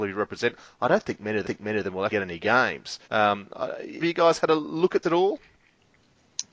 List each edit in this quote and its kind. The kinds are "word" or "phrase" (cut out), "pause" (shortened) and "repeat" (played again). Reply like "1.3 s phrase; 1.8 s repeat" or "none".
1.4 s repeat; 2.1 s word; 3.0 s pause; 4.0 s word; 5.0 s word